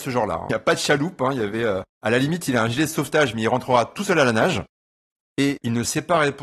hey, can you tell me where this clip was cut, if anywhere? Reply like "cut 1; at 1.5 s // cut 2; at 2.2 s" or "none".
none